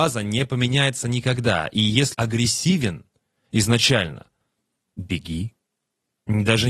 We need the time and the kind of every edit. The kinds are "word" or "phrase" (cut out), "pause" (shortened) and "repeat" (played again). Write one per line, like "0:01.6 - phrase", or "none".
0:02.1 - word